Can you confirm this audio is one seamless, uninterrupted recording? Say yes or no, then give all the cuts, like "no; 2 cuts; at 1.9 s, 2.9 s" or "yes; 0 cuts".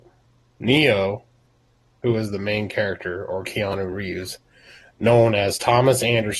yes; 0 cuts